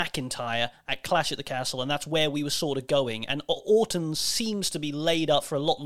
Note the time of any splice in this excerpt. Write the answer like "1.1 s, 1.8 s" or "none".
none